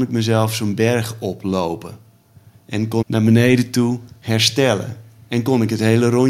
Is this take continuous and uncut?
no; 1 cut; at 3.0 s

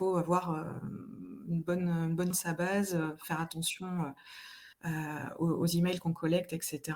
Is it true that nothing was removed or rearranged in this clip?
no; 2 cuts; at 2.3 s, 4.7 s

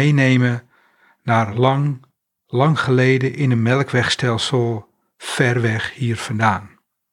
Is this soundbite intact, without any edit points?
yes; 0 cuts

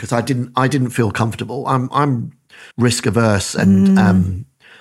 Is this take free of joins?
no; 1 cut; at 2.7 s

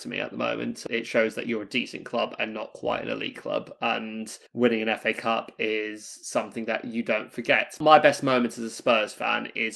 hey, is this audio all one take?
no; 1 cut; at 4.5 s

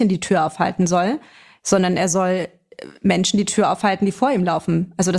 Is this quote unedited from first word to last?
yes; 0 cuts

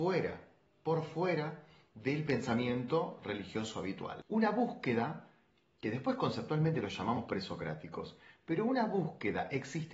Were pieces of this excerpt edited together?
no; 0 cuts

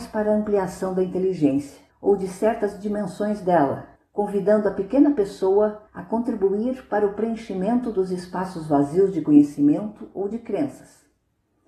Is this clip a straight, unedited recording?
no; 3 cuts; at 1.9 s, 4.0 s, 5.9 s

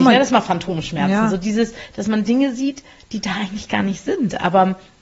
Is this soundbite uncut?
yes; 0 cuts

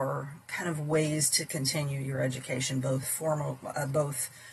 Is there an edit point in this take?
no; 0 cuts

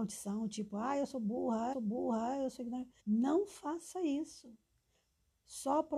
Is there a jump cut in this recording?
yes; 2 cuts; at 1.7 s, 3.0 s

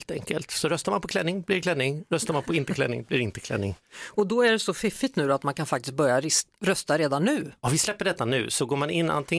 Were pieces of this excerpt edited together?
no; 0 cuts

